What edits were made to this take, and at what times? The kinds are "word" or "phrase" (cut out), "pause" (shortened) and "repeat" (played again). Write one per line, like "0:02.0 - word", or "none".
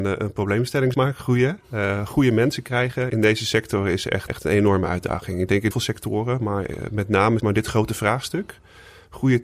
0:00.9 - word
0:03.1 - word
0:04.3 - word
0:05.7 - word
0:07.4 - word